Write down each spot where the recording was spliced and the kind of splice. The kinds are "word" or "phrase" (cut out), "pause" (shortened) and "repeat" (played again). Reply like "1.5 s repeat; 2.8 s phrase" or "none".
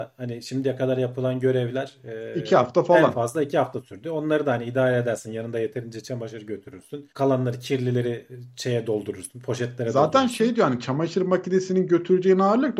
7.1 s pause